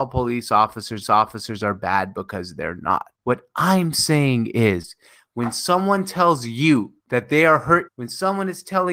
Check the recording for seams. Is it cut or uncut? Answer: cut